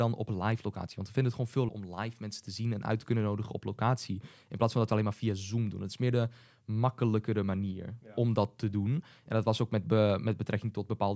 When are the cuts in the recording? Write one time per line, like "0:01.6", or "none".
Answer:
0:01.7